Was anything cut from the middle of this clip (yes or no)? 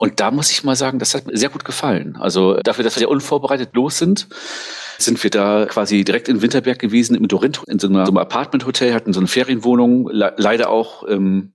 yes